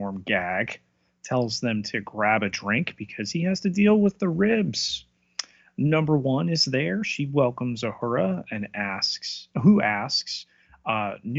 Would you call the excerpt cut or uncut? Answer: uncut